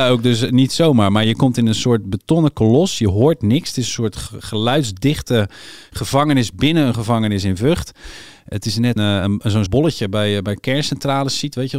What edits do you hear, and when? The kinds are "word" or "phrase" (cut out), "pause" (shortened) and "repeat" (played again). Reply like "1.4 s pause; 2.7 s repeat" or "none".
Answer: 9.0 s word; 9.7 s word; 10.0 s word

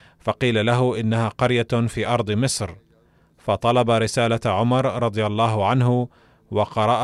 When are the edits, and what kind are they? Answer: none

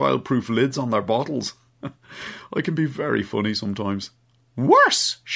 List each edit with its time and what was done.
none

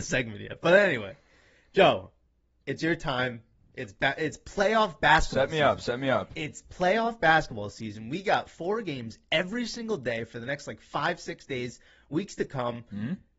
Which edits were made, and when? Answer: none

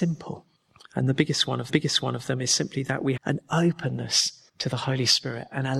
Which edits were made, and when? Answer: 1.7 s repeat; 3.2 s phrase; 4.5 s pause

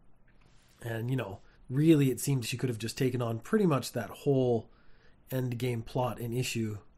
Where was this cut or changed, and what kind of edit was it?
1.5 s pause; 2.4 s word

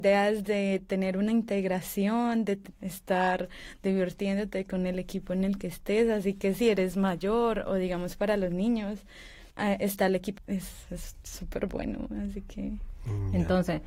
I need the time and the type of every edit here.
2.7 s pause; 9.5 s pause; 10.4 s phrase

